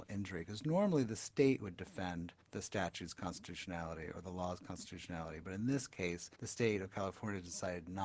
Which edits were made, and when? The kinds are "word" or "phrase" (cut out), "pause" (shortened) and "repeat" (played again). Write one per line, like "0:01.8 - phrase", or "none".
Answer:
0:02.4 - pause
0:06.3 - pause